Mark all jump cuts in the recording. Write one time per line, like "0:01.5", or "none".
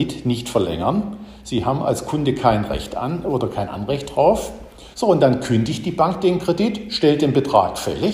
0:04.9